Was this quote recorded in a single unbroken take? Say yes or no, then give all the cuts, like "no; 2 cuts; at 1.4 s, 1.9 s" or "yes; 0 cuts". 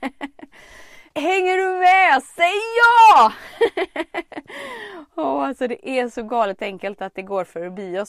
no; 1 cut; at 1.1 s